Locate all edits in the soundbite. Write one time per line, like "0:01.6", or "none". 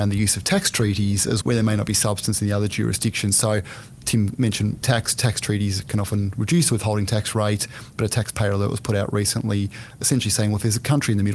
0:01.4
0:04.8